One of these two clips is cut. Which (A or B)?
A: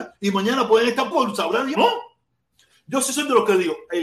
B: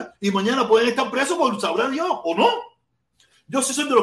A